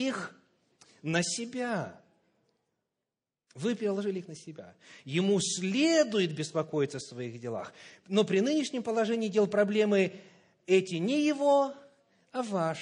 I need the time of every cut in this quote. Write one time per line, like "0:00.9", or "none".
none